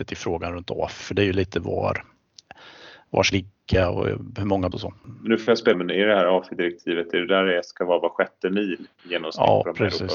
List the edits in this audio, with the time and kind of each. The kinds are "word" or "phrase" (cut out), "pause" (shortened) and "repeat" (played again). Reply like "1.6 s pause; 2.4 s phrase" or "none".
1.0 s word; 3.3 s word; 4.7 s word; 5.7 s phrase